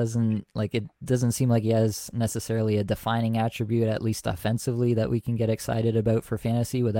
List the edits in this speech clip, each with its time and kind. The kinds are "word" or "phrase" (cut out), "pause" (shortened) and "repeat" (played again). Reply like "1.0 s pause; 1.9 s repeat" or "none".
none